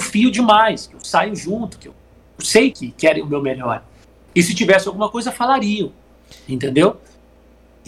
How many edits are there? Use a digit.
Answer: 2